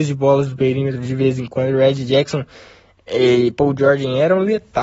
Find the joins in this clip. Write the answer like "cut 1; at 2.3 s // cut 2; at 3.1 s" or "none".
none